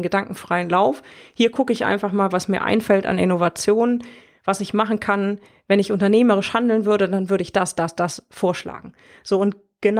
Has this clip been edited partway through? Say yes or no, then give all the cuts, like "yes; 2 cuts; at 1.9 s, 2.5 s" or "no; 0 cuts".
no; 0 cuts